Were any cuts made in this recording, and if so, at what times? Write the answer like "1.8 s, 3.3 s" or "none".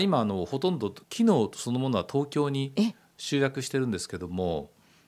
1.0 s